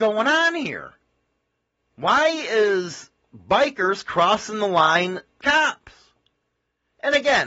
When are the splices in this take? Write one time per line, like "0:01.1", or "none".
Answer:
0:05.4